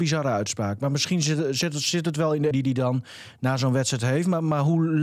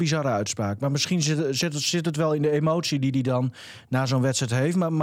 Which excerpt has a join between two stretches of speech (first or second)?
first